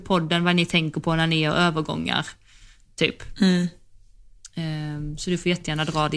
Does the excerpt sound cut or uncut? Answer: uncut